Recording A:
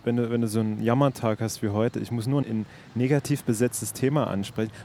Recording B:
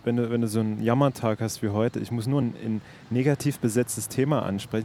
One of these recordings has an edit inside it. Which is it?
A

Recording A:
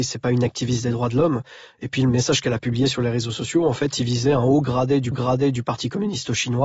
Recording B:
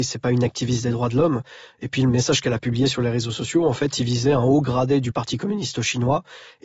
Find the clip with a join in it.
A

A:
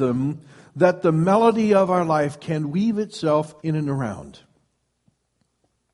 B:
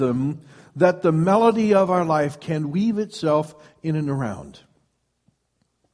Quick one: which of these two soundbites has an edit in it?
A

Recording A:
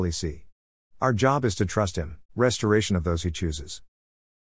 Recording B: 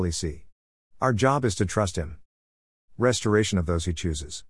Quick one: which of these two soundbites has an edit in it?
A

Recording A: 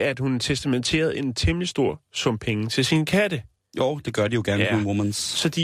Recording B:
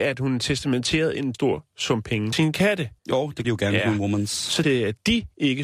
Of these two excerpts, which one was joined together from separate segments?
B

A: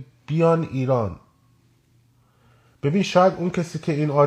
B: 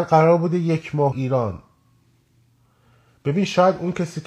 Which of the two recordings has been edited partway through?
B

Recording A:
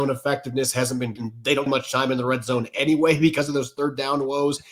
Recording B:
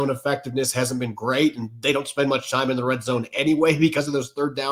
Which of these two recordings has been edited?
A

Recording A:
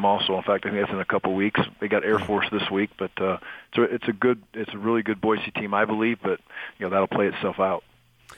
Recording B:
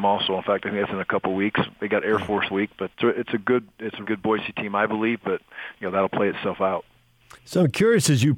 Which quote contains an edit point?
B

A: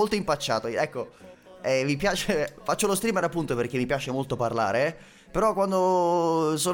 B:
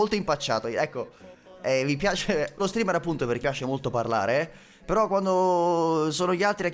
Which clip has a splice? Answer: B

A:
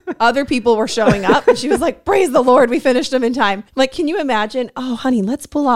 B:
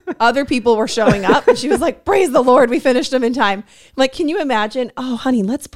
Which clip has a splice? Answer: A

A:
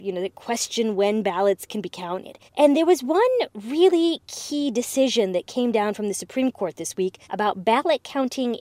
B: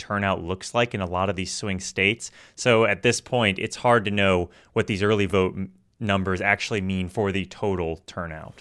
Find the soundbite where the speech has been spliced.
A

